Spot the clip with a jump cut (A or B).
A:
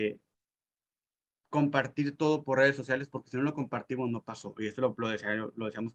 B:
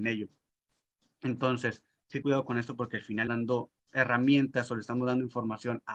B